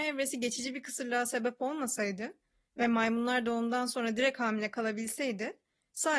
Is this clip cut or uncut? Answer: uncut